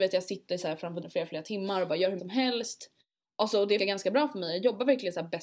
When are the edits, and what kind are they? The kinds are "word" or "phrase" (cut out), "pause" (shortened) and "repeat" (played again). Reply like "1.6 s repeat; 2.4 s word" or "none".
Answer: 1.0 s word; 2.2 s word; 3.8 s word